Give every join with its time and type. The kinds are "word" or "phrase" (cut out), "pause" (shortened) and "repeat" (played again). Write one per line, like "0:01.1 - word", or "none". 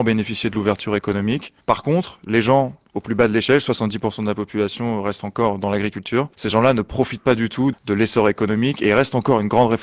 0:01.6 - pause
0:06.3 - pause
0:07.7 - word